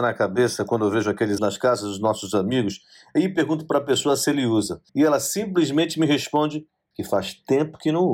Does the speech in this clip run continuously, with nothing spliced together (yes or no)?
no